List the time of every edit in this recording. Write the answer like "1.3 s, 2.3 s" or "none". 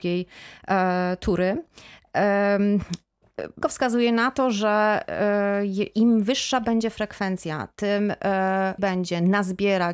3.6 s, 8.8 s

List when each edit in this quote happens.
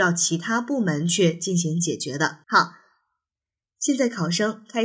2.4 s

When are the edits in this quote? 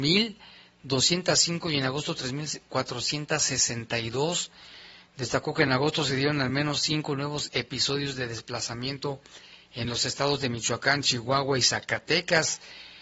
none

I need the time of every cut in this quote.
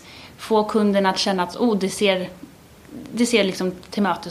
none

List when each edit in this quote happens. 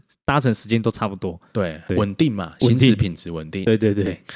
1.9 s

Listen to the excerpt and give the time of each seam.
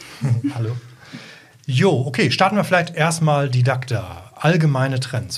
none

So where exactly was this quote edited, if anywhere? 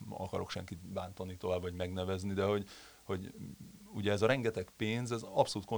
none

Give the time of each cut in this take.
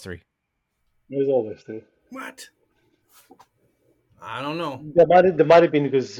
none

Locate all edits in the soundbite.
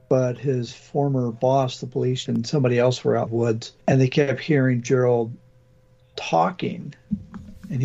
2.3 s, 3.3 s, 3.8 s

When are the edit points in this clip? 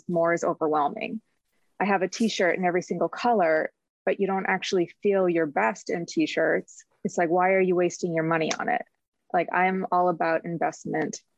none

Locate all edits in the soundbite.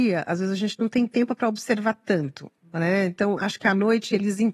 none

